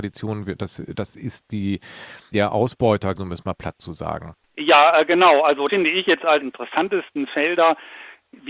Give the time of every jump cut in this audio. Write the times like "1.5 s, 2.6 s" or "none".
2.3 s, 3.2 s, 4.4 s, 5.7 s, 6.4 s